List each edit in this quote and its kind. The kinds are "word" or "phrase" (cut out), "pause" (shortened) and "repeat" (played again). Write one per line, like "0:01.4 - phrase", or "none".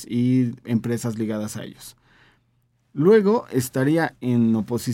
none